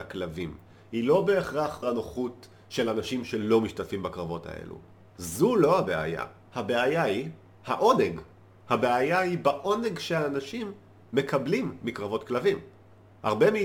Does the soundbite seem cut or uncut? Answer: cut